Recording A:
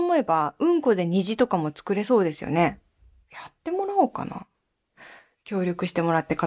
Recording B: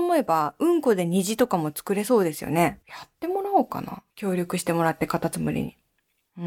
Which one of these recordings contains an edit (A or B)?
B